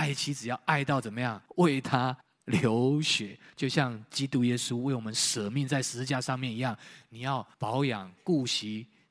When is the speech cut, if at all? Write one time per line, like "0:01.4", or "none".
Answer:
0:01.5
0:02.2
0:07.5